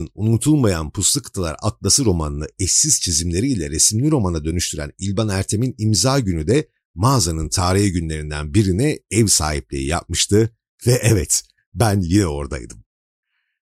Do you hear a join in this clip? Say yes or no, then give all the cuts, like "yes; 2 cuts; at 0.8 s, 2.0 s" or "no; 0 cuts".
no; 0 cuts